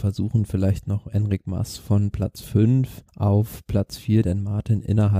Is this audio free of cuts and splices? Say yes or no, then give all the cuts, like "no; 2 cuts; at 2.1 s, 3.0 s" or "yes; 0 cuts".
no; 2 cuts; at 3.1 s, 4.2 s